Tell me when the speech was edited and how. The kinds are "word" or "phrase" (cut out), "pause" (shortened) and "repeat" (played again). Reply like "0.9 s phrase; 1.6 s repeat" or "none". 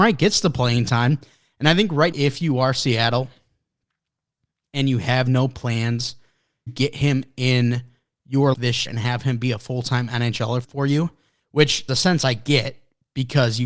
2.1 s word; 6.7 s word; 8.5 s word; 8.9 s word; 10.6 s word; 11.9 s word